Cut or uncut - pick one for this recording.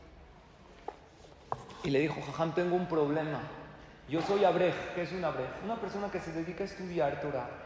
uncut